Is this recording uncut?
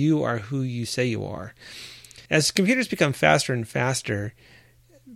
no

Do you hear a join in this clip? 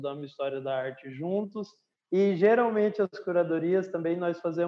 yes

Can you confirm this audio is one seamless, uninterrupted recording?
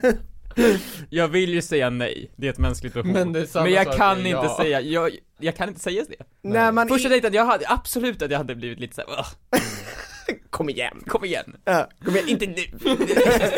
yes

